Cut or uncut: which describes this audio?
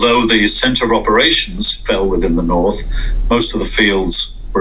uncut